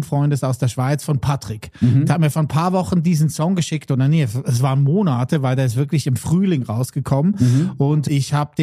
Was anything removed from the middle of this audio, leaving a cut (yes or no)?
no